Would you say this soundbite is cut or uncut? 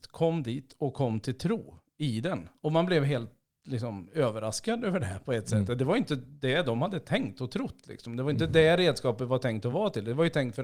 uncut